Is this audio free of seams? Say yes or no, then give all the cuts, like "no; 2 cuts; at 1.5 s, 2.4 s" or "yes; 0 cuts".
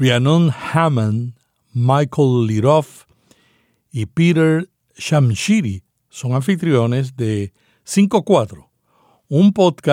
yes; 0 cuts